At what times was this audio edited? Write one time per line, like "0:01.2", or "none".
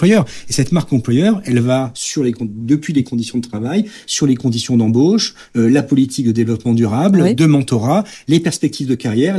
none